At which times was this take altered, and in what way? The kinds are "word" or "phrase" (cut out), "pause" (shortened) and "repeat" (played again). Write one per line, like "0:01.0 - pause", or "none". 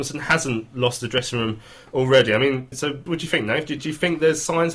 0:02.7 - word
0:03.1 - word
0:03.8 - word